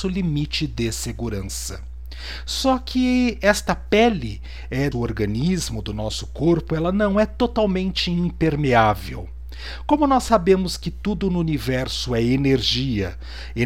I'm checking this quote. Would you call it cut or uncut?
cut